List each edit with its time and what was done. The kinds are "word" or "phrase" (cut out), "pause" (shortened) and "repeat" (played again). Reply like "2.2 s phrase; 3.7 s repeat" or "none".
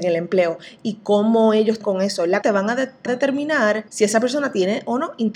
1.8 s word; 2.4 s phrase; 3.1 s phrase; 3.9 s pause

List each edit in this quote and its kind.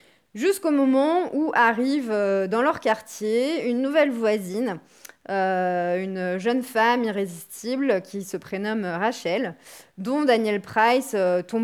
none

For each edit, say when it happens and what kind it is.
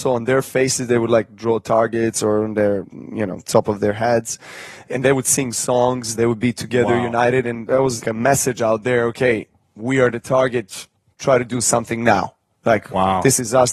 8.0 s word

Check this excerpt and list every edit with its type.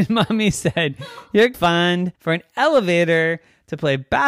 1.5 s word; 2.2 s pause

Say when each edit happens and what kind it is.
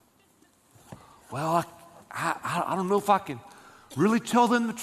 none

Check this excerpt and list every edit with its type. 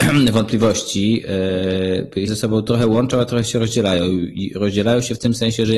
2.3 s word

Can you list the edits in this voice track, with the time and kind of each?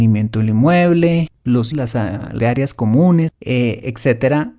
1.7 s word; 2.4 s word; 3.3 s word

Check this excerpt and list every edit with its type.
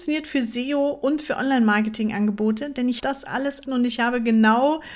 3.0 s word; 3.6 s word

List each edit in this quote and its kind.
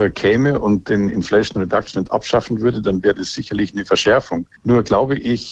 4.6 s pause

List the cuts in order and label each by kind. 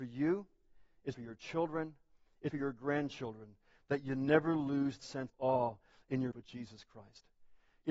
1.1 s word; 2.5 s phrase; 5.0 s word; 5.3 s word; 6.3 s word

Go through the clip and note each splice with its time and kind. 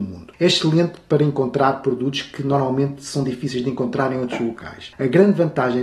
none

